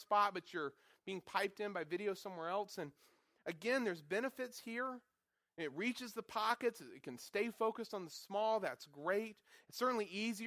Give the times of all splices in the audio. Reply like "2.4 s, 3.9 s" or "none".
none